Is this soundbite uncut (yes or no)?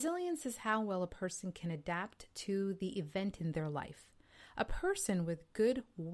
yes